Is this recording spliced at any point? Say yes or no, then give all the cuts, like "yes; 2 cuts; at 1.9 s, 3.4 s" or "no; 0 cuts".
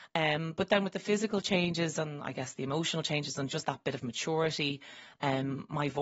no; 0 cuts